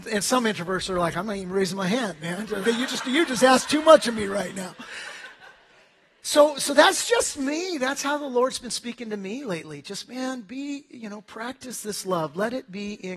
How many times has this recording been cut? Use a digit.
1